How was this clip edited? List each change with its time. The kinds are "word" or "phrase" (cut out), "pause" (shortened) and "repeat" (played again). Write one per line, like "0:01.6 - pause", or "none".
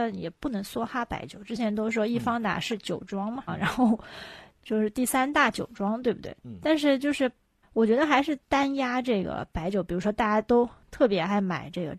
0:03.5 - word
0:06.4 - pause
0:07.6 - word
0:08.4 - pause